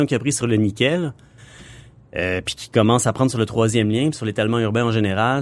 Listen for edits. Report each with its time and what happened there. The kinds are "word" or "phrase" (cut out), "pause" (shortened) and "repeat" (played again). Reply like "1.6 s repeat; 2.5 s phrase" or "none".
none